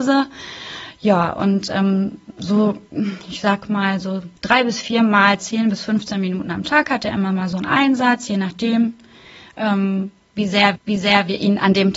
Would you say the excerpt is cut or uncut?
cut